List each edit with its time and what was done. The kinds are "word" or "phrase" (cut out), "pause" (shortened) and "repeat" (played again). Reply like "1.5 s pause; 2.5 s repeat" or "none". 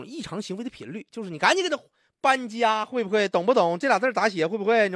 none

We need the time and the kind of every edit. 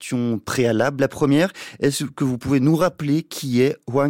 none

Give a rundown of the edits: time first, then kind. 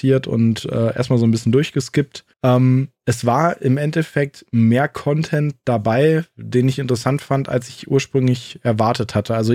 2.3 s pause

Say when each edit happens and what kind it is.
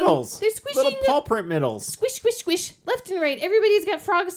none

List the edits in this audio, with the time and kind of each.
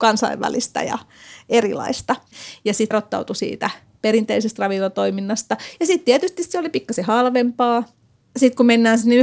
2.9 s word

